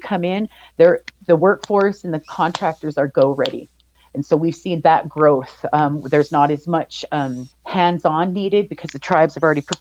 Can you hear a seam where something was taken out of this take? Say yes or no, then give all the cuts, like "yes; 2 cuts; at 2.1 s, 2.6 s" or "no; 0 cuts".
no; 0 cuts